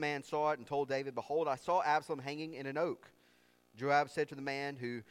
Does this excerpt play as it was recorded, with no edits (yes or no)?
yes